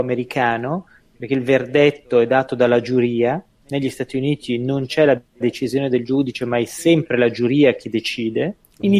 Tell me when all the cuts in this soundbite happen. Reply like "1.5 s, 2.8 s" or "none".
none